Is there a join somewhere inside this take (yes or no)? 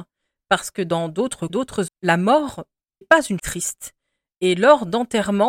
yes